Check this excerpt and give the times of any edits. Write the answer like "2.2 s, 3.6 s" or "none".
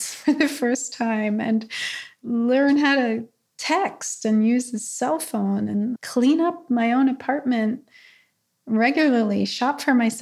6.0 s